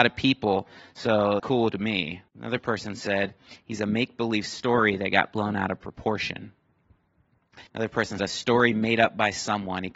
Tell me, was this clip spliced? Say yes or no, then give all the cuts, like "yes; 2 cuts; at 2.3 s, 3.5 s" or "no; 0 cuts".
yes; 4 cuts; at 1.4 s, 2.3 s, 7.7 s, 8.2 s